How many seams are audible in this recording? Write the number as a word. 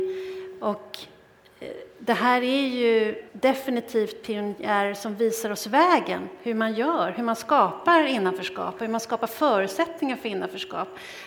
one